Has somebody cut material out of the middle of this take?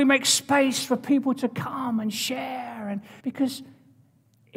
yes; 1 cut; at 3.2 s

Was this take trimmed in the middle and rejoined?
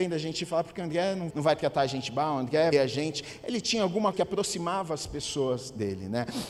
yes; 3 cuts; at 1.3 s, 2.7 s, 4.1 s

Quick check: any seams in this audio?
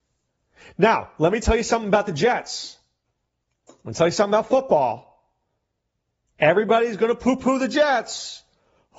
no; 0 cuts

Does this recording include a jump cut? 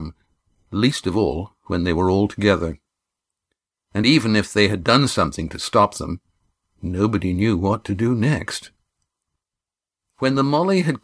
no; 0 cuts

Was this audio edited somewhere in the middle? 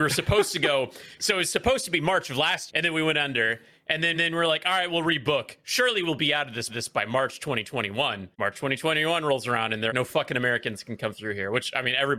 yes; 5 cuts; at 2.7 s, 4.1 s, 6.7 s, 8.3 s, 9.9 s

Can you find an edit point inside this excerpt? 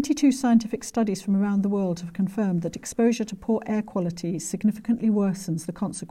no; 0 cuts

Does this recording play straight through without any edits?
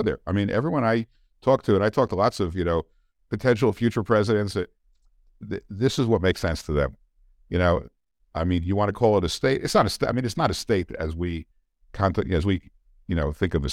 yes; 0 cuts

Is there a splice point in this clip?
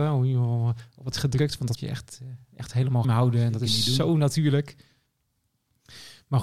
yes; 3 cuts; at 1.1 s, 1.8 s, 3.0 s

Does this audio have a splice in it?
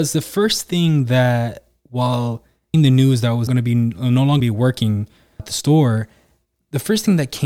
yes; 4 cuts; at 2.7 s, 3.5 s, 4.4 s, 5.4 s

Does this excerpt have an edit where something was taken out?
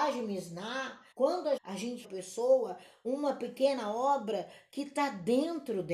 yes; 3 cuts; at 1.1 s, 1.6 s, 2.0 s

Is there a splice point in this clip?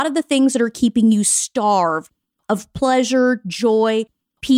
no; 0 cuts

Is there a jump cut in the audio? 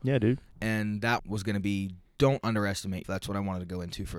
yes; 3 cuts; at 1.2 s, 2.1 s, 3.0 s

